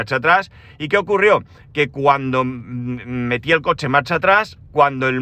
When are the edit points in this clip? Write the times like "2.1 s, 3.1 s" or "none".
none